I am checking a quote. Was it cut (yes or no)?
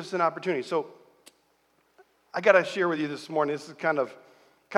no